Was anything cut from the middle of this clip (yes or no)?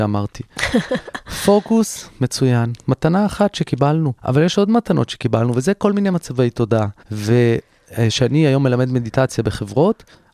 yes